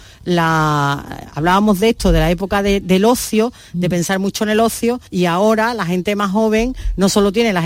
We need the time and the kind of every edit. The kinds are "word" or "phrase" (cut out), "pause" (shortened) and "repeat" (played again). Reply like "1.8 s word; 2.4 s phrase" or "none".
5.1 s pause